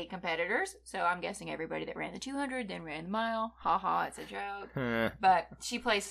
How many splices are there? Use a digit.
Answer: 0